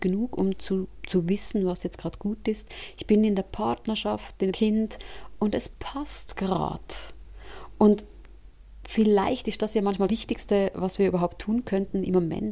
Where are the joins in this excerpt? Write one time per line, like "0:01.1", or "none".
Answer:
0:04.5
0:10.1